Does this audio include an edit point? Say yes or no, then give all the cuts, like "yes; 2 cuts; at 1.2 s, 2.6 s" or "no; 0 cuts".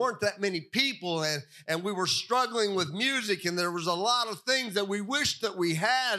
no; 0 cuts